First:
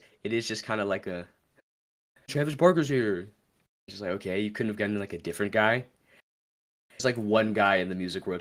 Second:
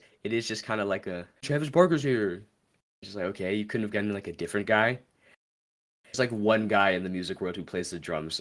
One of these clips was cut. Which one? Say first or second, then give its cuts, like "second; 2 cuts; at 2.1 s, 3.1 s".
second; 1 cut; at 1.4 s